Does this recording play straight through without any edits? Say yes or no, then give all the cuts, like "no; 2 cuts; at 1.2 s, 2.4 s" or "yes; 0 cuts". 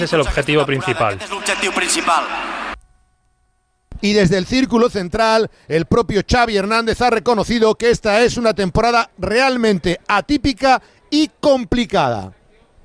yes; 0 cuts